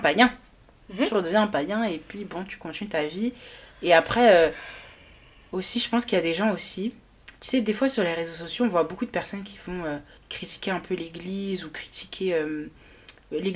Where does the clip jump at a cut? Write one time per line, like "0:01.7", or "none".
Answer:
0:10.2